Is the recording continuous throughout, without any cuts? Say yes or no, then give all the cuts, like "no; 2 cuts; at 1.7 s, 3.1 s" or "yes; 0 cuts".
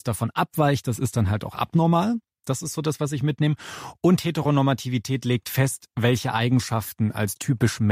yes; 0 cuts